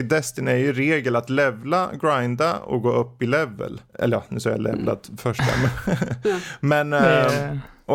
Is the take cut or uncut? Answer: cut